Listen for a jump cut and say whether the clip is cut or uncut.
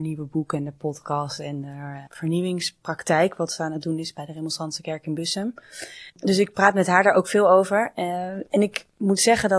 cut